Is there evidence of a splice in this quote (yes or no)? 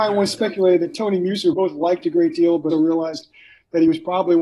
yes